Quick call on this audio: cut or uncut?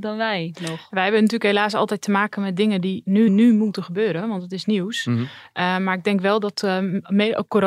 cut